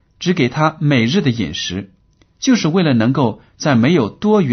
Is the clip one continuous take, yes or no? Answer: yes